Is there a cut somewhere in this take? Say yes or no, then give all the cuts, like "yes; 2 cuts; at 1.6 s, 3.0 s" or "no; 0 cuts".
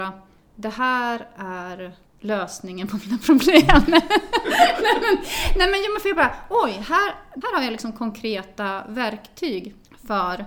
yes; 2 cuts; at 2.1 s, 7.4 s